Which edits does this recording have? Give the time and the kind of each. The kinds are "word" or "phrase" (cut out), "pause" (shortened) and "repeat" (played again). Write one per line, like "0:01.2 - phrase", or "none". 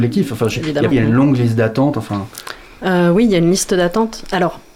0:00.9 - word